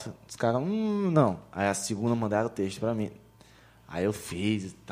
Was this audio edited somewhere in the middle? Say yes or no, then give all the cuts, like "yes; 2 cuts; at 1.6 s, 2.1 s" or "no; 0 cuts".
no; 0 cuts